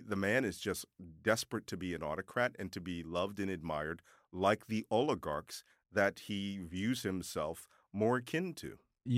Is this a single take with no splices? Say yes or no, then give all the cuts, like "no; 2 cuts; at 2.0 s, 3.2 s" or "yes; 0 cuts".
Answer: yes; 0 cuts